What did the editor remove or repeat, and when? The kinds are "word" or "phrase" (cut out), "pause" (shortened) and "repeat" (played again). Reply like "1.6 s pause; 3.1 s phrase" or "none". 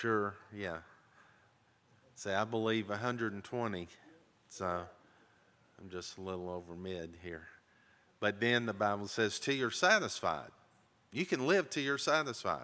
none